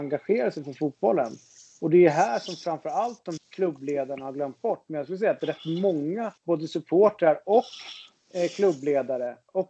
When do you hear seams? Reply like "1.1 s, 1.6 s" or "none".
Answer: 3.4 s, 6.4 s